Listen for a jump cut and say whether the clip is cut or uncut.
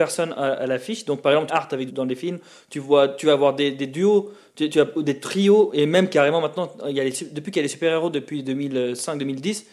cut